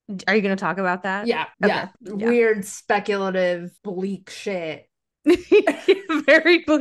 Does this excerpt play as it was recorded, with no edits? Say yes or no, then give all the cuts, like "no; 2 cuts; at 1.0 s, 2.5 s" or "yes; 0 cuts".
no; 3 cuts; at 1.5 s, 1.9 s, 3.8 s